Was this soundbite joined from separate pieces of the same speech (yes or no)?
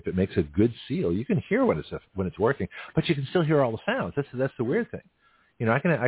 no